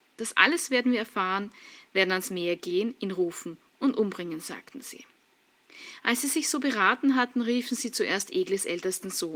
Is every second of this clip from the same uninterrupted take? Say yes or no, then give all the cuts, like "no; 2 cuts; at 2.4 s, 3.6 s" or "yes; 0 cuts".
yes; 0 cuts